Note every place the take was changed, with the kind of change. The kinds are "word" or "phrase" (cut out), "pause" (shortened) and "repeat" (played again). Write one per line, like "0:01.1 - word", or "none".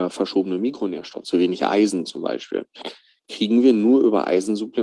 0:01.2 - word